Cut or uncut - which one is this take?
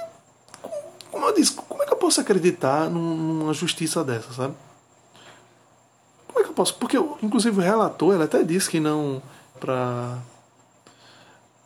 cut